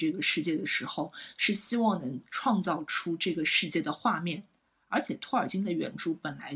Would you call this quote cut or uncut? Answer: uncut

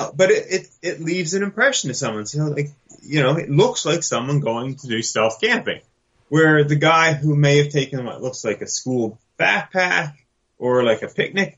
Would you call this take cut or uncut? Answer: uncut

